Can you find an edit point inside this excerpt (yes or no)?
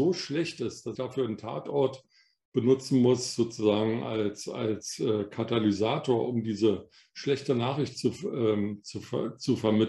yes